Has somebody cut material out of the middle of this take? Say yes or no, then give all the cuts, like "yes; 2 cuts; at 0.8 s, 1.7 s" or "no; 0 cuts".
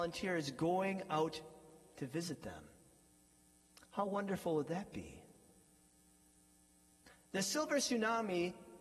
no; 0 cuts